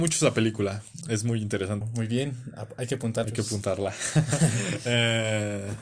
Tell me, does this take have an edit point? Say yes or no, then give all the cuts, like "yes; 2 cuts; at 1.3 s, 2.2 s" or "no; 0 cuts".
yes; 3 cuts; at 1.0 s, 1.8 s, 3.2 s